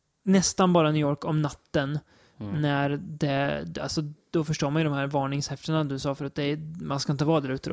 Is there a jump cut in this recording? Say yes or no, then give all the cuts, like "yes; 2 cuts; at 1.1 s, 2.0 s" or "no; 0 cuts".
no; 0 cuts